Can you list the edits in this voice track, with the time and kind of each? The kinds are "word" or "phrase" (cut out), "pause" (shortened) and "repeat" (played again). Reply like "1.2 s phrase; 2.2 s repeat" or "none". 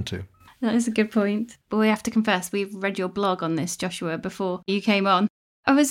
1.6 s pause

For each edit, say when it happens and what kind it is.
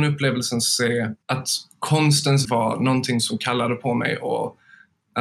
1.2 s pause; 2.4 s word

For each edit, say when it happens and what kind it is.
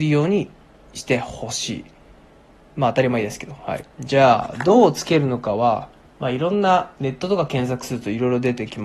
2.5 s pause; 3.9 s pause; 6.0 s pause; 7.0 s pause

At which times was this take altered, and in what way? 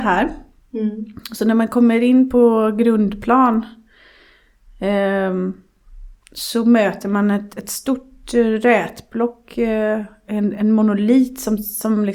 none

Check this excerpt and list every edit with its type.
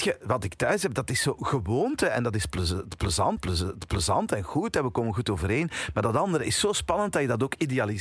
3.4 s repeat

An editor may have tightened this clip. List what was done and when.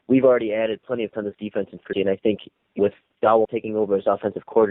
1.1 s word; 1.9 s word; 2.8 s word; 3.4 s word

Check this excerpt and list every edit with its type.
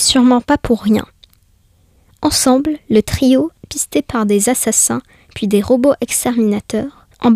none

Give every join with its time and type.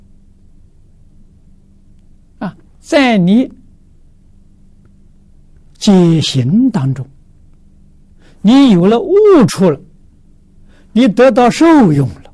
none

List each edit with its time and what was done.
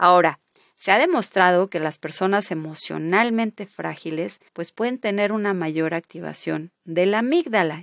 4.5 s pause; 6.8 s pause

